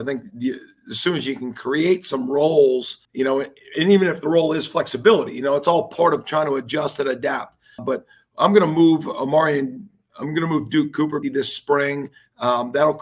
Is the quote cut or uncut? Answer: cut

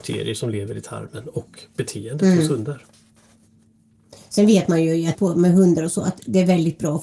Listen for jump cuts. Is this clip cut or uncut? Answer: cut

